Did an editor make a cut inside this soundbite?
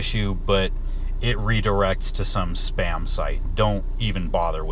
yes; 1 cut; at 3.4 s

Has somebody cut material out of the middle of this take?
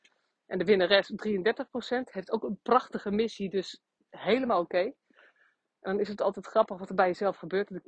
no; 0 cuts

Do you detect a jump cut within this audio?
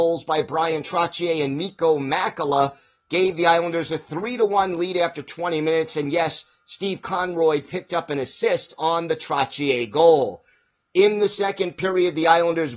no; 0 cuts

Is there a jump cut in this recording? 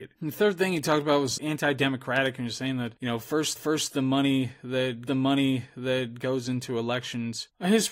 yes; 3 cuts; at 1.4 s, 3.6 s, 5.1 s

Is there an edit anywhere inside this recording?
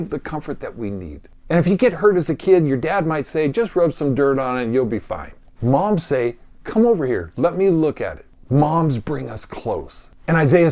no; 0 cuts

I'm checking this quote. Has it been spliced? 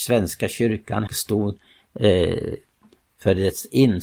yes; 1 cut; at 1.1 s

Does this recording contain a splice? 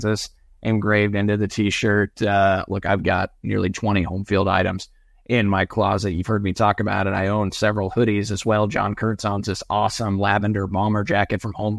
no; 0 cuts

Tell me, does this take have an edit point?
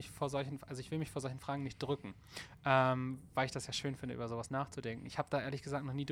no; 0 cuts

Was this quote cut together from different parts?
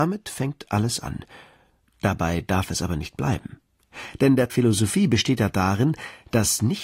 yes; 1 cut; at 4.5 s

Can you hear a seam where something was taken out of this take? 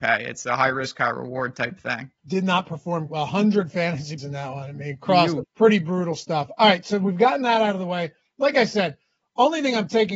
yes; 4 cuts; at 2.2 s, 3.1 s, 4.2 s, 5.4 s

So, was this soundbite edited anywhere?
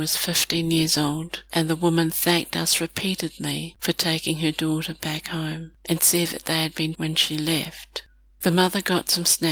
yes; 2 cuts; at 6.9 s, 8.3 s

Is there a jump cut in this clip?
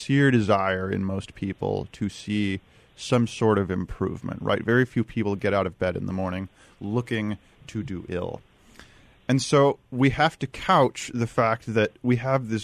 no; 0 cuts

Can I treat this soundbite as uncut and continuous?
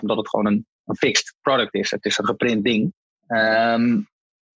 no; 1 cut; at 3.1 s

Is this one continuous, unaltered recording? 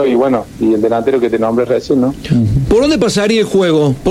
yes; 0 cuts

